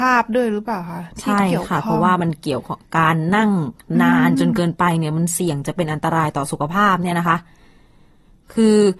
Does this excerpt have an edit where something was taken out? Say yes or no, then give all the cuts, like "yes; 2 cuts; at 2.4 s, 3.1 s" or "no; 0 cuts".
no; 0 cuts